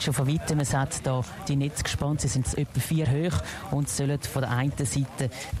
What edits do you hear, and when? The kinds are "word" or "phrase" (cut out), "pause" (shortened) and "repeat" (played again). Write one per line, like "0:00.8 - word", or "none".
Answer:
0:01.5 - word
0:02.4 - word
0:03.0 - word